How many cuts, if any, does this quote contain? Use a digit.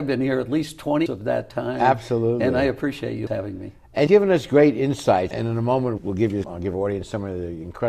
6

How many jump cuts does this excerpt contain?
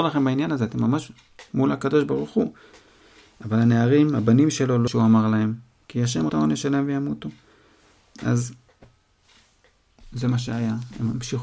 2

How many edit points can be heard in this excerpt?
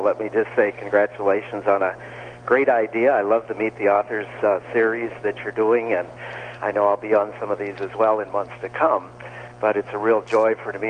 0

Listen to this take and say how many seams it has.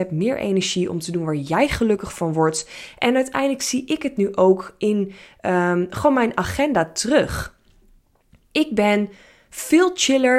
0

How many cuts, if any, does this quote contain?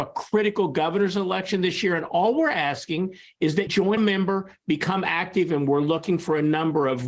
2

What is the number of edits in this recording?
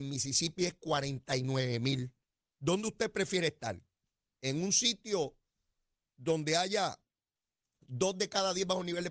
0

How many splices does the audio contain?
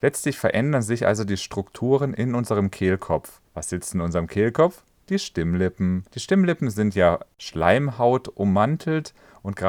2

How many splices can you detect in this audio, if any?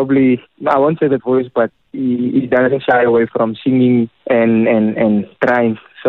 4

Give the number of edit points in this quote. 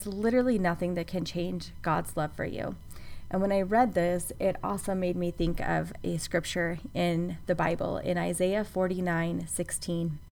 0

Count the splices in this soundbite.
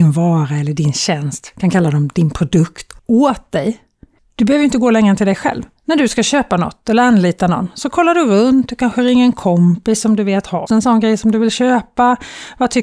3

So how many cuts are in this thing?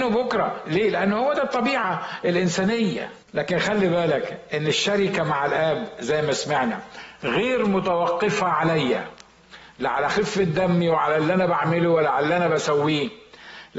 1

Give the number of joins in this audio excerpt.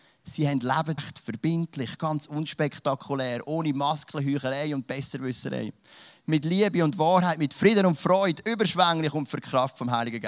1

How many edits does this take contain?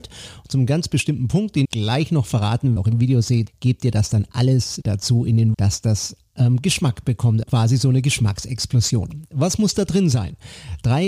6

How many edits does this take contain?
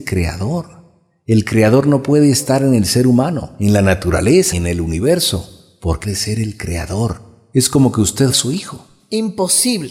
3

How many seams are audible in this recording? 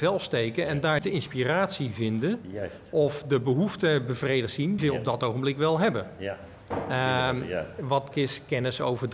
3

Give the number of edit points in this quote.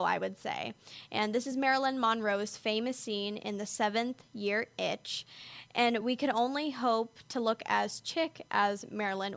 0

